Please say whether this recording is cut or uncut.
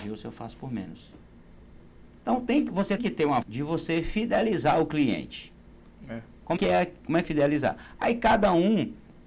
cut